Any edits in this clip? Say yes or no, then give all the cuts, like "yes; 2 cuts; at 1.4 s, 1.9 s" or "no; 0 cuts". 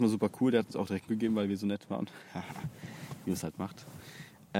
yes; 1 cut; at 1.1 s